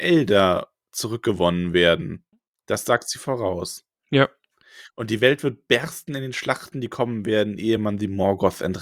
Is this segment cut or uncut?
uncut